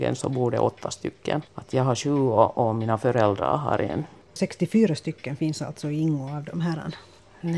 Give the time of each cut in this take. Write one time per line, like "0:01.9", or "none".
0:01.5